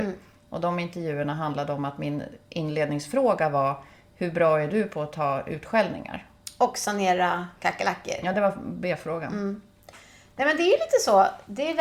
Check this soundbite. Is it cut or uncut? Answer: uncut